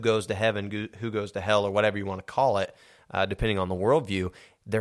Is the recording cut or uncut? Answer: uncut